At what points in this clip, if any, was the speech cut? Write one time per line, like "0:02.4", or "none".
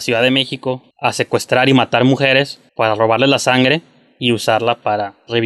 0:00.9
0:02.7